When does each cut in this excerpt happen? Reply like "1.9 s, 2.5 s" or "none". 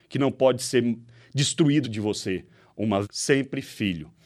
1.8 s, 3.0 s